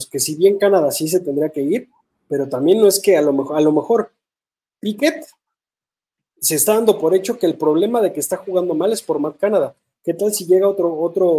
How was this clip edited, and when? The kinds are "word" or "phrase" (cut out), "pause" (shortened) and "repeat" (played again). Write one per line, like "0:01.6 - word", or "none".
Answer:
none